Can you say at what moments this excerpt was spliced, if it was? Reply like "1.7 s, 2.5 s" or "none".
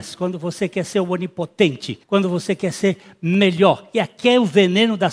2.0 s